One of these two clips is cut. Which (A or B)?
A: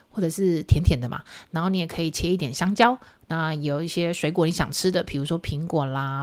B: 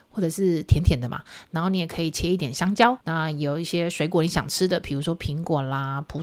B